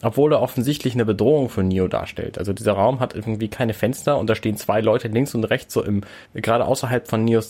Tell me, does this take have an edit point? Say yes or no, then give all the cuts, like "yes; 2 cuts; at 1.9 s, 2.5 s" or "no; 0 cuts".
yes; 1 cut; at 6.2 s